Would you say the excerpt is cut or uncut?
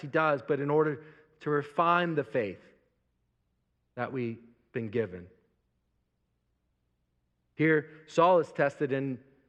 uncut